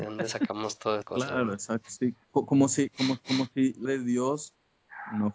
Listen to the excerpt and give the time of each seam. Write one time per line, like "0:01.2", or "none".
0:01.0
0:03.2
0:03.9